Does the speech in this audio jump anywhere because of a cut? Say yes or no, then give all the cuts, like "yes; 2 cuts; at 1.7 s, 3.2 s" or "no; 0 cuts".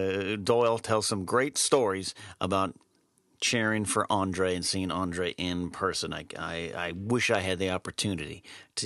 no; 0 cuts